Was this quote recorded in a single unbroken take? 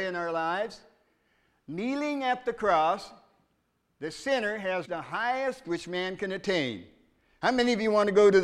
no; 2 cuts; at 4.8 s, 5.6 s

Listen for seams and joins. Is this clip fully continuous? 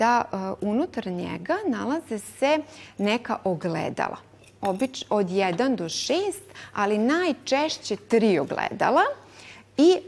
yes; 0 cuts

